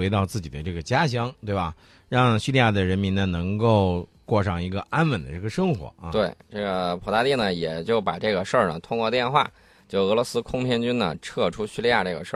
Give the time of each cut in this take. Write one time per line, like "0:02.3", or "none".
none